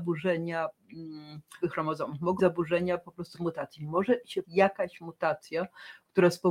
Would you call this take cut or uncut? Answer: cut